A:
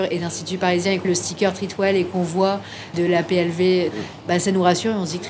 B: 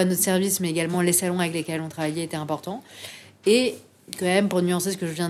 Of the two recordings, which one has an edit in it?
A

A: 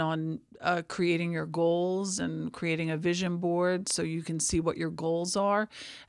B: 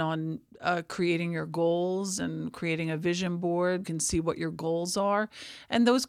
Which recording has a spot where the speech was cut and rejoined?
B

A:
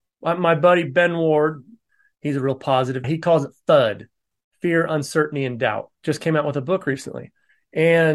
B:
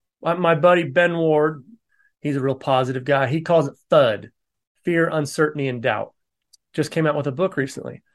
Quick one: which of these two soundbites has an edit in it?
A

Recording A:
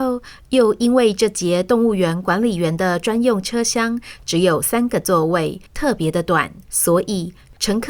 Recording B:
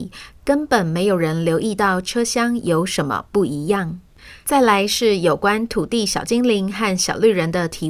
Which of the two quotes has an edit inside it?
A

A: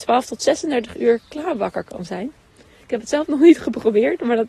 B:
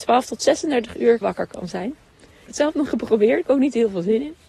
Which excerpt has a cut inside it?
B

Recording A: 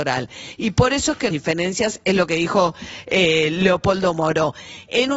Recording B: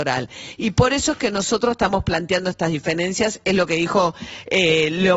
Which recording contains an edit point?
A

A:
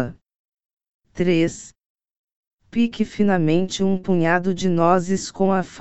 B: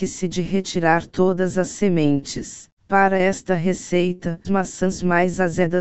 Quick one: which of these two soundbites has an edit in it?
B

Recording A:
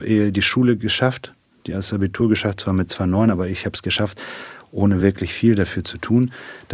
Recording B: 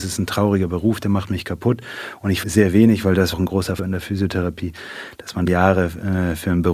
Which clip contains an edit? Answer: B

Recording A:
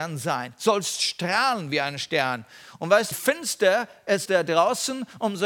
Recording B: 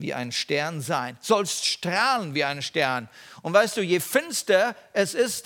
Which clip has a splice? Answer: A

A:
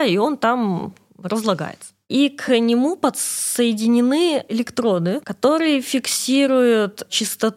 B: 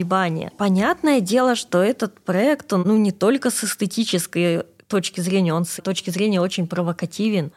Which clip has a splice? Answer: B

